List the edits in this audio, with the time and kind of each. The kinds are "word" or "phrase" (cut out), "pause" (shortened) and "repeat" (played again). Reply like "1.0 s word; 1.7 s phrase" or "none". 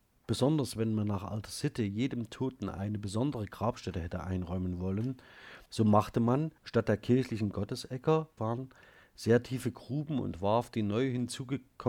5.7 s pause; 6.6 s pause; 8.4 s phrase